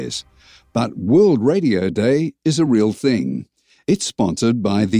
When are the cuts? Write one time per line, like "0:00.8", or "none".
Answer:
none